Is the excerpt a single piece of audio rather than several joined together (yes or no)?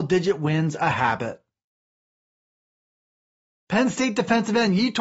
yes